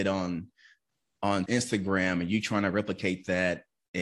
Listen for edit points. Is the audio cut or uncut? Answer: cut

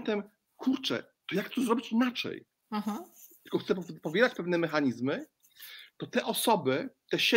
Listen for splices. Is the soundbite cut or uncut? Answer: uncut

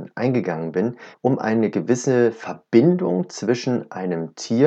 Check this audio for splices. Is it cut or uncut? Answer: cut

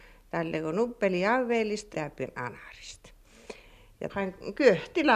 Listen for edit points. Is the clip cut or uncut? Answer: cut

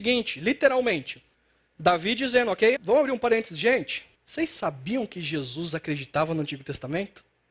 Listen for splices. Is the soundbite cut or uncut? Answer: cut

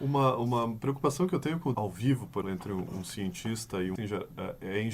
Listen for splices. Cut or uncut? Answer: cut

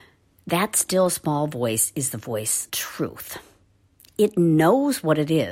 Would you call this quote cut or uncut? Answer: cut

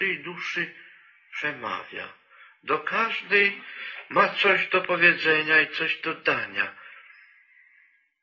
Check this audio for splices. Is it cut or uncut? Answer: uncut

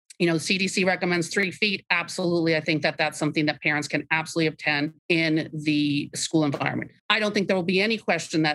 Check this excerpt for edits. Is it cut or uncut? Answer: cut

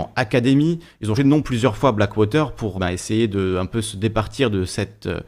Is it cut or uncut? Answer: cut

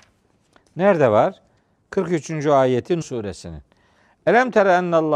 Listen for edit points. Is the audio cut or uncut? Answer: cut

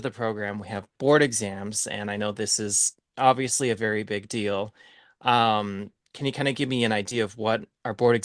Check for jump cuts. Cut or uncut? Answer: uncut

